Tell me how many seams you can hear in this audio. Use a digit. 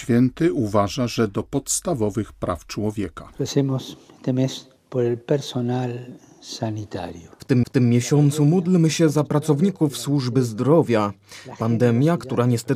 3